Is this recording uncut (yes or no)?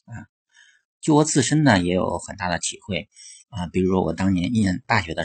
no